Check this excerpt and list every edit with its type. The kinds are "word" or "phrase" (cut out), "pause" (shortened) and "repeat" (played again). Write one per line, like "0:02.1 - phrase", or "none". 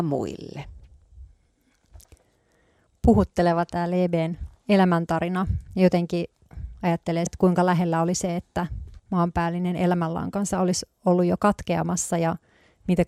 0:07.3 - word
0:09.0 - word

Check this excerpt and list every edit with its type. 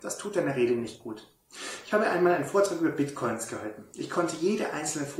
none

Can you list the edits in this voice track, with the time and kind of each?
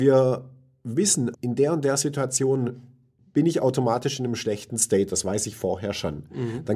0:01.3 - word
0:03.2 - word

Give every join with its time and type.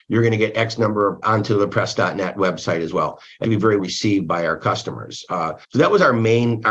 0:01.2 - phrase
0:03.4 - phrase
0:03.8 - word
0:05.6 - pause

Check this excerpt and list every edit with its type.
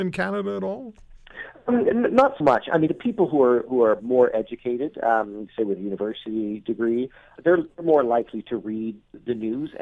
0:02.4 - word
0:02.9 - word
0:07.4 - word

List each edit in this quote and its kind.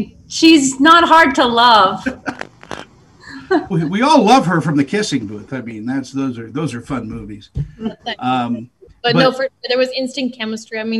0:03.7 - word

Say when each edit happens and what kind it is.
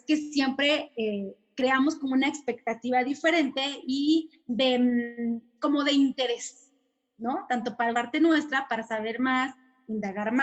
0:04.4 - pause
0:07.9 - phrase

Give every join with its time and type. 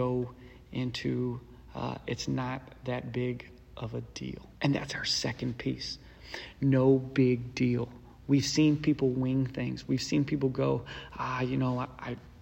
0:04.6 - pause

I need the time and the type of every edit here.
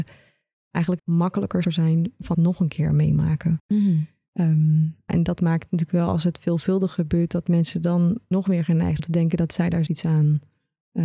0:01.0 - word
0:01.6 - word
0:02.3 - word
0:05.1 - word
0:08.3 - word
0:09.0 - word
0:09.9 - word

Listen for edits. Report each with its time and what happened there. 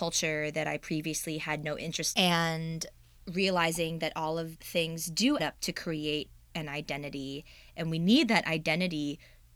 0:02.1 - word
0:04.6 - word
0:05.4 - word

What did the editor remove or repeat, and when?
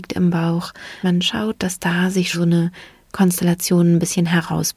0:01.0 - word
0:02.3 - word

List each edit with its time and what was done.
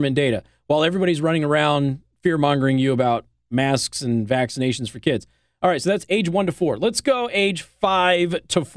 none

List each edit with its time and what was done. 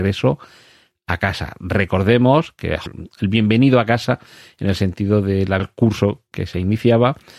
0:02.9 - phrase
0:05.6 - word

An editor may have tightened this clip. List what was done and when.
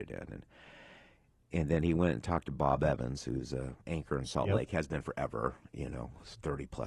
0:03.8 - pause

